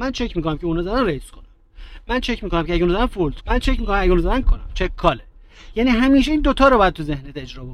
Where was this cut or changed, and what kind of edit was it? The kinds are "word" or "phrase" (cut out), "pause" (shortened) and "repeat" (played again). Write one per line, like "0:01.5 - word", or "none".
0:03.4 - word
0:04.4 - word